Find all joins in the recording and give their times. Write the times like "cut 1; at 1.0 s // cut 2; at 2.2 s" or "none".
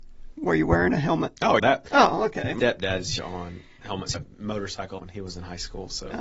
cut 1; at 1.6 s // cut 2; at 2.6 s // cut 3; at 3.2 s // cut 4; at 4.1 s // cut 5; at 5.0 s